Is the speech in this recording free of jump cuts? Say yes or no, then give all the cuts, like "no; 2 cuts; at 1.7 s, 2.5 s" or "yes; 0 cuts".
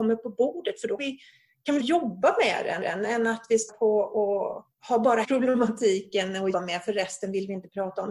no; 7 cuts; at 1.0 s, 1.8 s, 2.8 s, 3.7 s, 4.7 s, 5.2 s, 6.5 s